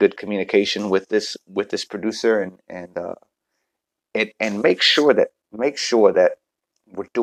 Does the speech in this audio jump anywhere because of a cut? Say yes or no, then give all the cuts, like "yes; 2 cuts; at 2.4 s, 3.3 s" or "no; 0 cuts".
no; 0 cuts